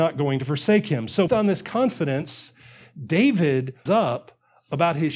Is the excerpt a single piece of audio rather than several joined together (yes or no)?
no